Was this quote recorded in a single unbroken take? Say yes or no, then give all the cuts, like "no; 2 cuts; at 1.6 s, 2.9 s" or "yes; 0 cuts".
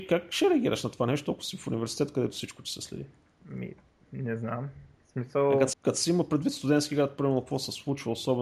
no; 1 cut; at 5.7 s